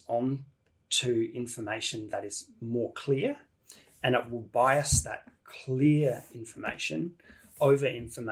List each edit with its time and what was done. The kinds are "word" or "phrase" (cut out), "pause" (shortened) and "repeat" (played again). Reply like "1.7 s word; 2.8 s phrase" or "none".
none